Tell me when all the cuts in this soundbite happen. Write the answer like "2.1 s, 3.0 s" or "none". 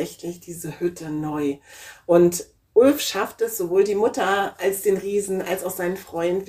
2.6 s